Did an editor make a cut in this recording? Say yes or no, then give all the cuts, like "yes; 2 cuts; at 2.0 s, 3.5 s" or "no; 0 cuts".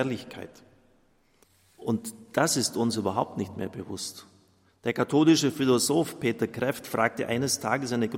yes; 1 cut; at 1.4 s